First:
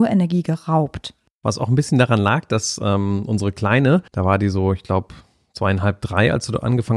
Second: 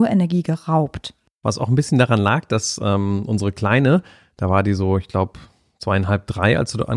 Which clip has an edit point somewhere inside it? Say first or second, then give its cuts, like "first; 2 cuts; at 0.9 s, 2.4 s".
first; 1 cut; at 4.1 s